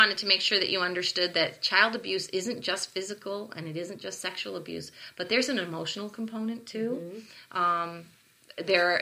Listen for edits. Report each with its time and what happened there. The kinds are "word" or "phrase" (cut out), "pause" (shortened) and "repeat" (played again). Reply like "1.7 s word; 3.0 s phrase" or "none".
none